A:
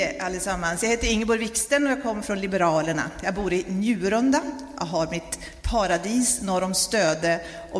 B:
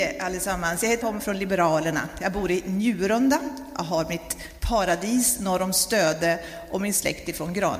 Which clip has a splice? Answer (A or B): B